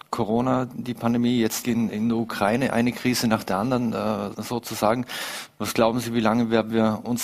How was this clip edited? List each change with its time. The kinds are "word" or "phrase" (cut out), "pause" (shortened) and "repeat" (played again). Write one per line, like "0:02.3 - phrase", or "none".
0:01.6 - phrase
0:04.3 - word